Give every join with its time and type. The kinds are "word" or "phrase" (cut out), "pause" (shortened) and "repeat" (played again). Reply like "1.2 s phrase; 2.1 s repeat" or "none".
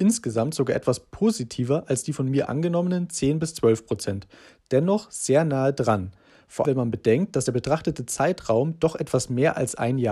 6.6 s word